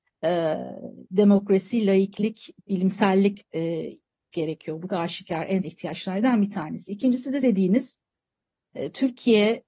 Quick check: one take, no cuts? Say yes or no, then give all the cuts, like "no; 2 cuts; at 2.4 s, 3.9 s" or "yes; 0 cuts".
no; 6 cuts; at 1.1 s, 3.4 s, 4.3 s, 4.9 s, 5.6 s, 7.4 s